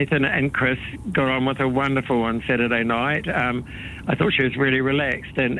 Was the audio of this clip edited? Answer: no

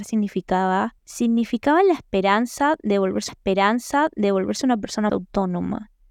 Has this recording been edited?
yes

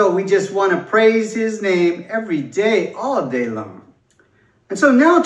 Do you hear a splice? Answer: no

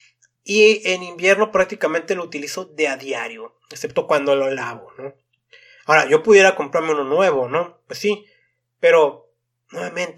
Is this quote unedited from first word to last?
yes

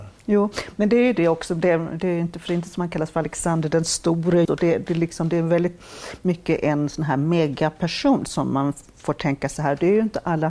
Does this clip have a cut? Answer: yes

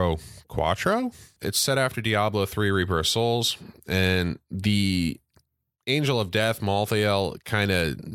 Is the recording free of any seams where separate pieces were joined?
yes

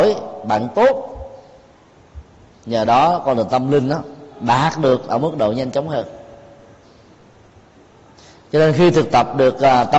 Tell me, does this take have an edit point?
no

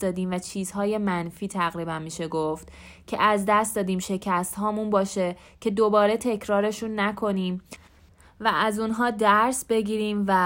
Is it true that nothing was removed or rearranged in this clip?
yes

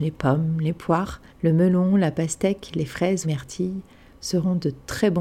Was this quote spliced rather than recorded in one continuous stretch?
yes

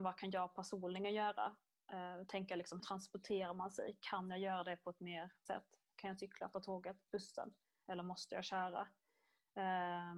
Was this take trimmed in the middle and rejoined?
yes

